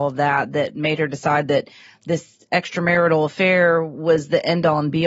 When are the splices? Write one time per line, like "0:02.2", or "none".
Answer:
none